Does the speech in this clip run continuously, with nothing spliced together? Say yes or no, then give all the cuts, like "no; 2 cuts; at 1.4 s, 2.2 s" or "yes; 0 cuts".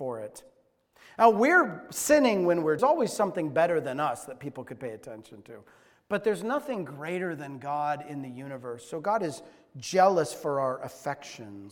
no; 1 cut; at 2.8 s